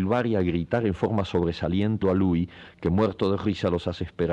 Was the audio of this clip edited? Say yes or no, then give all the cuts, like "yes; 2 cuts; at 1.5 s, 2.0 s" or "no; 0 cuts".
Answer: yes; 1 cut; at 2.0 s